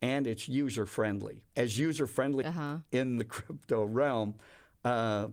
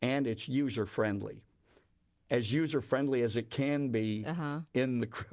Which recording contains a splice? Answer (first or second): first